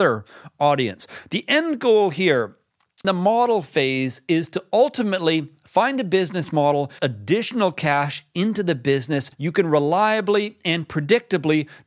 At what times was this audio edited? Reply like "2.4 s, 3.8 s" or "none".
3.0 s, 7.0 s, 9.3 s